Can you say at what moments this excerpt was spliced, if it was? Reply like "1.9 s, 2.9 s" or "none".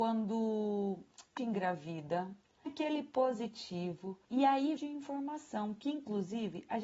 1.4 s, 2.7 s, 4.2 s, 4.8 s